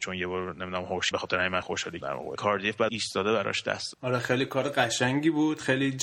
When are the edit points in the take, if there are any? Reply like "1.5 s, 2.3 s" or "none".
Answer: 1.1 s, 1.6 s, 2.0 s, 2.4 s, 2.9 s, 3.9 s